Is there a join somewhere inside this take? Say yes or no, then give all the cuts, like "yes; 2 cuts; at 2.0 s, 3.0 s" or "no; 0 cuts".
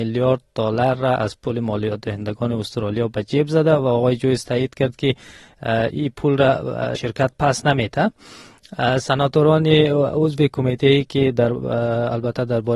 yes; 1 cut; at 7.0 s